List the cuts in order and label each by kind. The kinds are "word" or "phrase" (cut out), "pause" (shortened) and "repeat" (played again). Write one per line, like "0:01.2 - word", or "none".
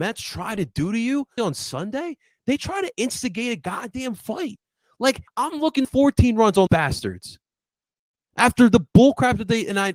0:01.4 - word
0:05.3 - phrase
0:05.8 - phrase
0:06.7 - word